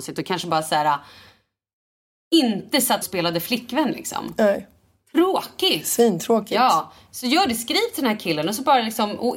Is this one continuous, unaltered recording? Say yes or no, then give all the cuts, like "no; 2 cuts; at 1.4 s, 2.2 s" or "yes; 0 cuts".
no; 1 cut; at 3.0 s